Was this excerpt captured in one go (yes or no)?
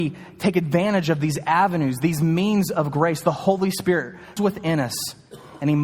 no